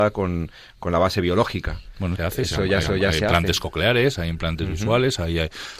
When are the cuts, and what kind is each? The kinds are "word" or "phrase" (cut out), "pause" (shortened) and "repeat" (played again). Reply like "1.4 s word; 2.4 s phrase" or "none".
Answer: 2.2 s phrase; 2.8 s repeat

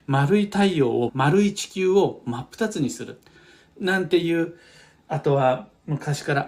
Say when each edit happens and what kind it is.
1.1 s word

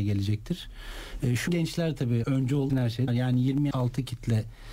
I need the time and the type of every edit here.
1.5 s word; 2.2 s word; 2.7 s word; 3.1 s word; 3.7 s word

